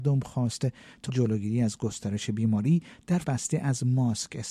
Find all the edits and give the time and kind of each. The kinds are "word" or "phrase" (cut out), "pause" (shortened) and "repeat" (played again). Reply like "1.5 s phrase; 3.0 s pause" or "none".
1.1 s word; 3.2 s word